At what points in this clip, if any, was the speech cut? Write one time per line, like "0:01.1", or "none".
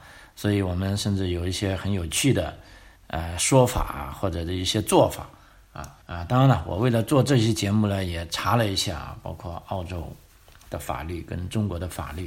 0:03.0
0:06.0